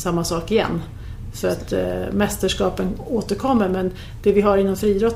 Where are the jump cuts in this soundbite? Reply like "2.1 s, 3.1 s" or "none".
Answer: none